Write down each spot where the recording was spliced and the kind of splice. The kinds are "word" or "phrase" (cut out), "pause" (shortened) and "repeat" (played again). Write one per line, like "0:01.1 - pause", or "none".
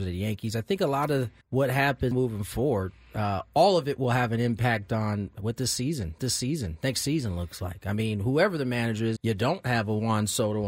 0:01.4 - pause
0:02.1 - word
0:06.2 - repeat
0:09.2 - word